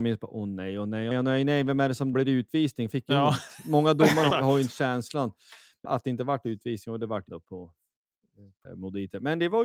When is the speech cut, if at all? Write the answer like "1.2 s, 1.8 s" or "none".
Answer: 1.1 s, 2.1 s, 2.9 s, 4.3 s, 5.9 s, 7.3 s, 8.7 s